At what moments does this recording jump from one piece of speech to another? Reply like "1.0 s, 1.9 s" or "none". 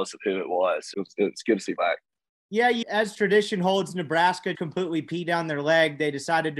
0.9 s, 1.8 s, 2.8 s, 3.1 s, 4.5 s